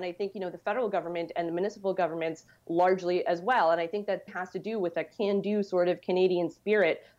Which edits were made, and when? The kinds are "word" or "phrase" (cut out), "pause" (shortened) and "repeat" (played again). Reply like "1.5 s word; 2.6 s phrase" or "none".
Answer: 4.3 s word